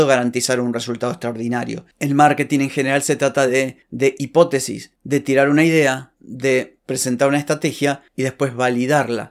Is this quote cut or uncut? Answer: uncut